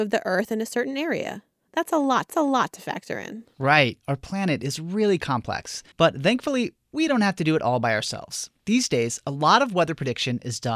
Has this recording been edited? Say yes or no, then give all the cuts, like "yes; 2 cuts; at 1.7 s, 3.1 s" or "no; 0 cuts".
yes; 2 cuts; at 2.3 s, 5.9 s